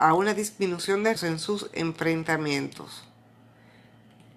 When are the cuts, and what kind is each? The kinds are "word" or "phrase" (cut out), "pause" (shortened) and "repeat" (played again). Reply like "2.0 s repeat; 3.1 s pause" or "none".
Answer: 1.2 s word